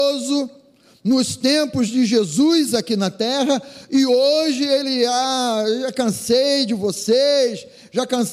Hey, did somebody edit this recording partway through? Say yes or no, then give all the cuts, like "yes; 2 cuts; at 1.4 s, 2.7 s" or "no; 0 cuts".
no; 0 cuts